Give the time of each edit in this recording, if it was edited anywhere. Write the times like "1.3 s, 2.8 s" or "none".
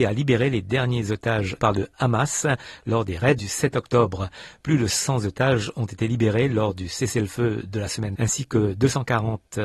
1.6 s, 3.4 s, 8.2 s